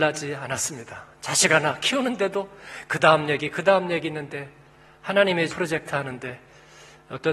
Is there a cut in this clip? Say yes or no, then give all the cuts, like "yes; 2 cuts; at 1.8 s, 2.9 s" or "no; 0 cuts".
yes; 1 cut; at 5.5 s